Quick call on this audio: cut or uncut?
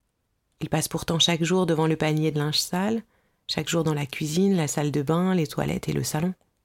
uncut